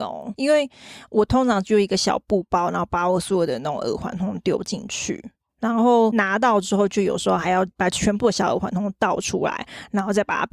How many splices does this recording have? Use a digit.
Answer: 0